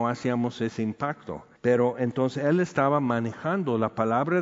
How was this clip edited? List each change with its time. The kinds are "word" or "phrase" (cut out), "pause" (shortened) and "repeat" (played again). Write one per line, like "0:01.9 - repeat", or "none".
0:01.6 - pause